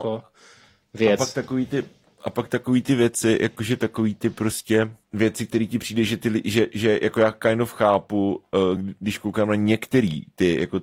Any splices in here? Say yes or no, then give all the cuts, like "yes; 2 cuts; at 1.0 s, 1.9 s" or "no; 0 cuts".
no; 0 cuts